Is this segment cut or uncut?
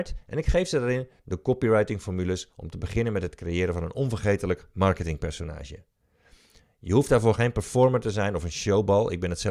uncut